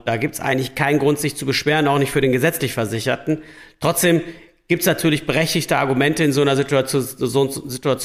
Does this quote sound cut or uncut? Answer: uncut